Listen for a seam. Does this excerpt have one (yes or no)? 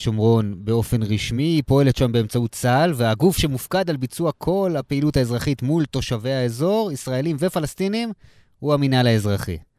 no